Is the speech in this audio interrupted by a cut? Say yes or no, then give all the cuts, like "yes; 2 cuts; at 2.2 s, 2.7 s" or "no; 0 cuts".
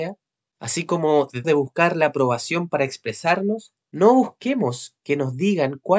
yes; 1 cut; at 1.4 s